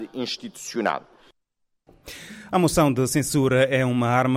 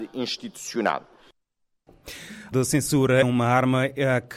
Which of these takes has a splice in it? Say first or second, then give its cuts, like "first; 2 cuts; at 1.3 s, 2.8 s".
second; 2 cuts; at 2.5 s, 3.2 s